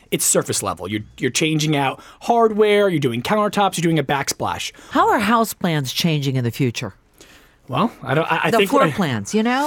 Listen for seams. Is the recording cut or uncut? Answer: uncut